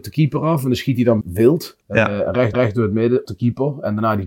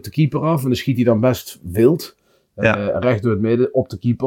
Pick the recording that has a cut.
first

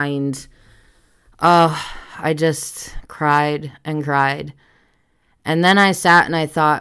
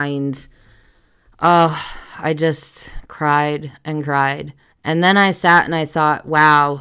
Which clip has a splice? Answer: second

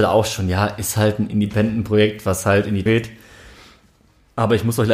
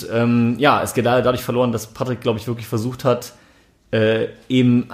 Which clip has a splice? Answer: first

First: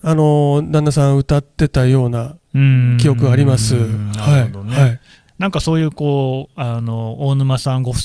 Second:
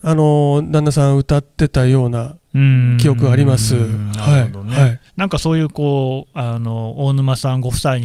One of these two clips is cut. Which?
second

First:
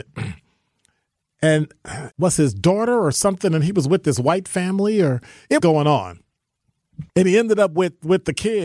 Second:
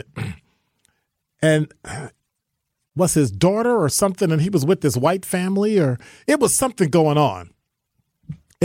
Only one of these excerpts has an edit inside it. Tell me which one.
first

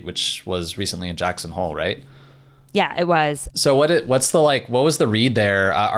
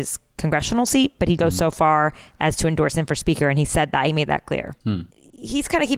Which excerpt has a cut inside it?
second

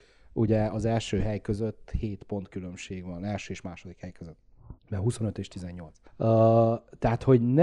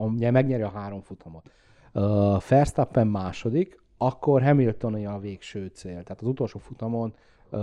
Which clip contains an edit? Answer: first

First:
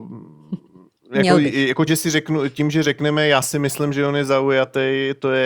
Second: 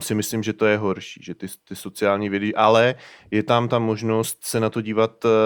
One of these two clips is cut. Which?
first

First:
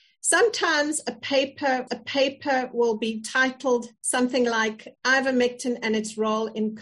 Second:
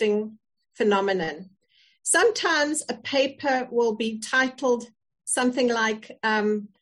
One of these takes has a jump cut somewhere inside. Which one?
first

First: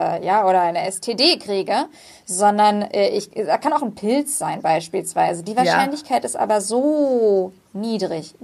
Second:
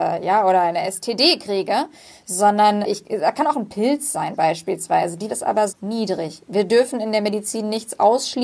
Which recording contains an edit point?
second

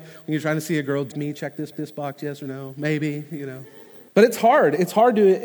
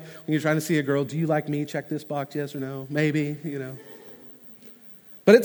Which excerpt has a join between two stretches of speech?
first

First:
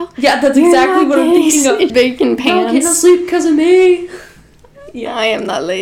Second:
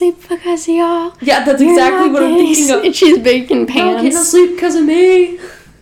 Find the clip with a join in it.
first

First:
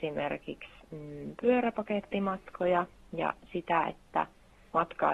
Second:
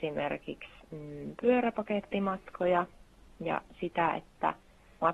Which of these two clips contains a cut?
first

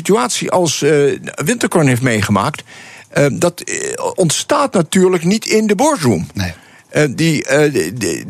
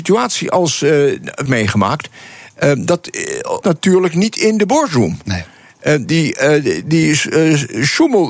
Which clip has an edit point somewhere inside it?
second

